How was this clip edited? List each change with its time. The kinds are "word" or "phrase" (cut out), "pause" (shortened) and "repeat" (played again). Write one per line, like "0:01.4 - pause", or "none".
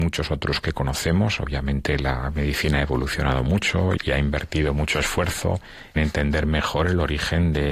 0:04.0 - word
0:06.0 - word